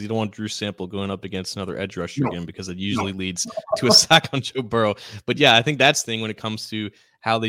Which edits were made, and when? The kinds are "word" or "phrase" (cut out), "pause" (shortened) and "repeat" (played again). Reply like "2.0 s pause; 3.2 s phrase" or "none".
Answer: 6.0 s word